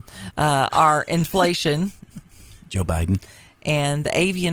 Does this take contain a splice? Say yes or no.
no